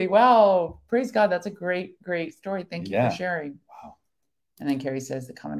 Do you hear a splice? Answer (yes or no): no